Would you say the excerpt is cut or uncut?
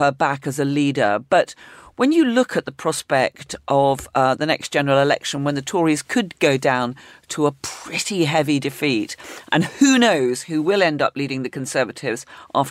uncut